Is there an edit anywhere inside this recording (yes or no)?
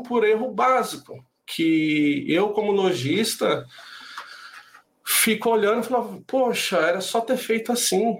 no